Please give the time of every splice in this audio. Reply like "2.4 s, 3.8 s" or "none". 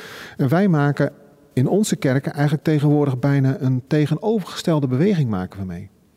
none